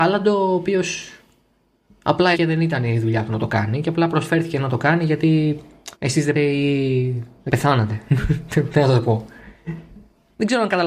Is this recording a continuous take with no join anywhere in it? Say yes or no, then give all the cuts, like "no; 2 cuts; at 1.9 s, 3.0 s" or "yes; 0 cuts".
no; 4 cuts; at 2.3 s, 5.9 s, 6.3 s, 7.5 s